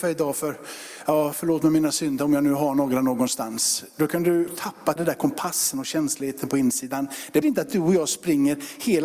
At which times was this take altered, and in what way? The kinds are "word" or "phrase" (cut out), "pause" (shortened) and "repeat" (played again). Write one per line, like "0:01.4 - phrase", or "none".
0:04.5 - phrase
0:05.0 - word
0:07.4 - word